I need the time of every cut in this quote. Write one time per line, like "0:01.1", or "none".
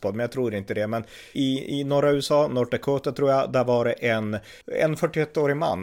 0:01.3
0:04.6